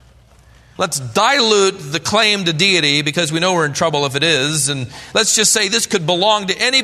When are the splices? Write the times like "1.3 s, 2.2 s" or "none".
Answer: none